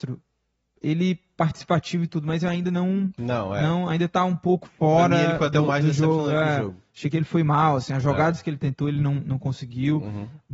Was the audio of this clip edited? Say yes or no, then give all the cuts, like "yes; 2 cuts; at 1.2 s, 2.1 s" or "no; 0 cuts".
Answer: no; 0 cuts